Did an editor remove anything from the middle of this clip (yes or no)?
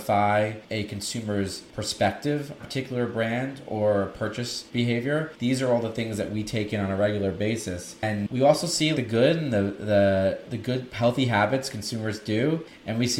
yes